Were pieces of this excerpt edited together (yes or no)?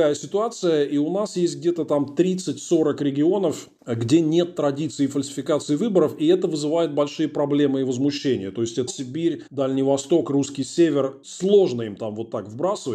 yes